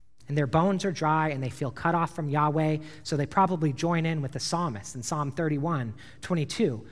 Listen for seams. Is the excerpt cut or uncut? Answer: uncut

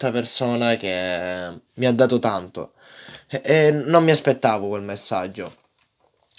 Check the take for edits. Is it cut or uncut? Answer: cut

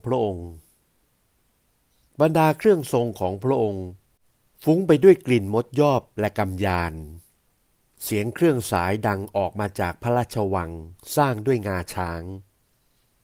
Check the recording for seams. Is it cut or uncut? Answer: uncut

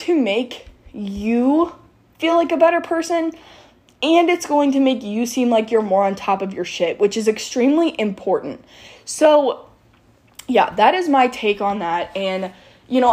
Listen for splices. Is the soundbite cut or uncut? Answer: uncut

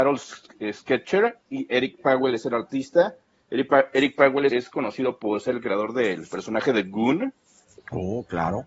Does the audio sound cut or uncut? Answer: cut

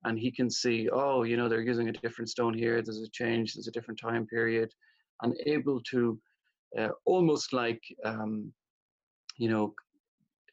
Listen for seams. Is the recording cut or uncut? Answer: uncut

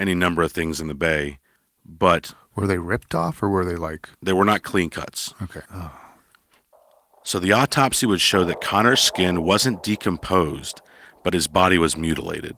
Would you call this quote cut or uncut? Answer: cut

